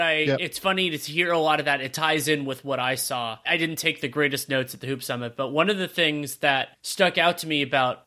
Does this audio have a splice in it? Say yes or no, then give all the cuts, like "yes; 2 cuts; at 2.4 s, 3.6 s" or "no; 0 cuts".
yes; 1 cut; at 3.4 s